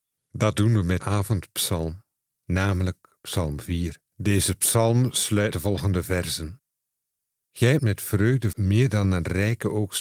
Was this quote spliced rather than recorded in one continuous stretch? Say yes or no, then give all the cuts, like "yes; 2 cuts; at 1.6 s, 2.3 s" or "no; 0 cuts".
yes; 5 cuts; at 1.0 s, 4.1 s, 5.5 s, 7.8 s, 8.5 s